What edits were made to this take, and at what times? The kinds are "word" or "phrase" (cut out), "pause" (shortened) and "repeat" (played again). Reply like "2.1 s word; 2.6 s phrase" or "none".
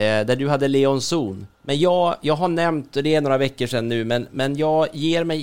1.5 s pause